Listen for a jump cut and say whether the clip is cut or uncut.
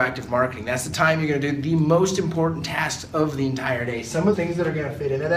cut